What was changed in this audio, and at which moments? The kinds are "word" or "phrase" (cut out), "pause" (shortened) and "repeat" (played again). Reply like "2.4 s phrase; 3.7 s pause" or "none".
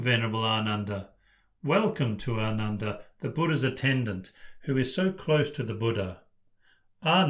none